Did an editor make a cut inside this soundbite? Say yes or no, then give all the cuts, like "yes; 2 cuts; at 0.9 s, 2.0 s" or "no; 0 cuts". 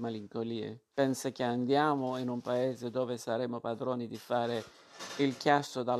yes; 1 cut; at 0.9 s